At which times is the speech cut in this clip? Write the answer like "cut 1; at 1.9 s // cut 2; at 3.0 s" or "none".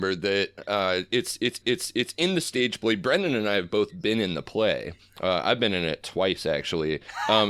cut 1; at 1.6 s